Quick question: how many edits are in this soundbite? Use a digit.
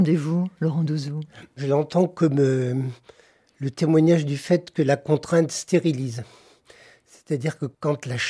0